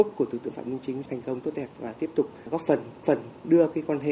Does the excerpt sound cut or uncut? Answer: cut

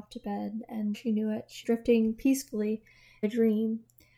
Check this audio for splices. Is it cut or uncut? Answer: cut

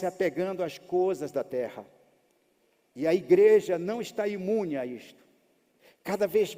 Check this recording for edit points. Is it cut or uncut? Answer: uncut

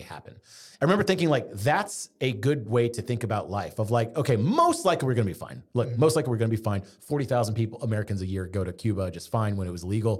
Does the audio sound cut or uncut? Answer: uncut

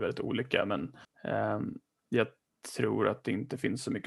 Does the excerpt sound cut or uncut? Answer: cut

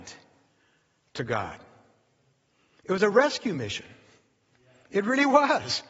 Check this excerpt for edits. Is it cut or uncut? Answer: uncut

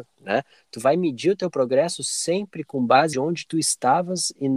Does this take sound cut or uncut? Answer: cut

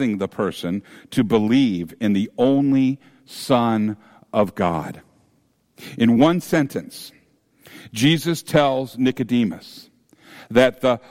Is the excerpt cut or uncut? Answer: uncut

